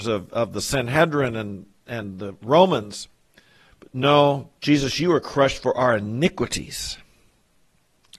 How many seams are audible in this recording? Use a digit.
1